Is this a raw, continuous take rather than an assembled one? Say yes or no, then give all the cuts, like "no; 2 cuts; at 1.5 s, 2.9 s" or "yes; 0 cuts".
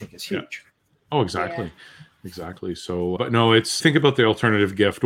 no; 2 cuts; at 3.2 s, 3.8 s